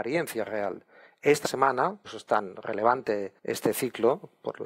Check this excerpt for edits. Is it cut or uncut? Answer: cut